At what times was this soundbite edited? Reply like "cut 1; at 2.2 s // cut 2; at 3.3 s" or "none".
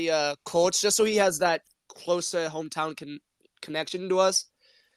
none